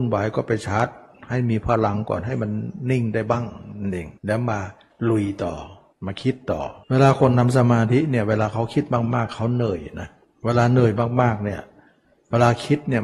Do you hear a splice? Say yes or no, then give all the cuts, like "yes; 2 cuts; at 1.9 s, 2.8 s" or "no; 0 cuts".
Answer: yes; 4 cuts; at 4.2 s, 5.9 s, 6.8 s, 10.2 s